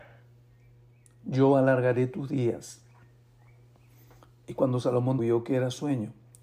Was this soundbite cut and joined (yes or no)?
yes